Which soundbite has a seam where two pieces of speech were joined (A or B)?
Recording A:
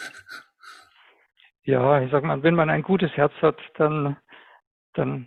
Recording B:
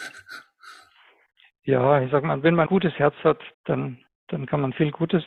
B